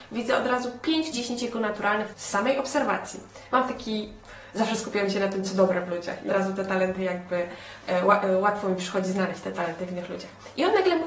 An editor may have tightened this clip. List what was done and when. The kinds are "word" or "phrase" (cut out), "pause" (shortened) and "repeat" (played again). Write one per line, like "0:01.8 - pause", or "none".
0:01.1 - word
0:02.1 - word
0:06.3 - word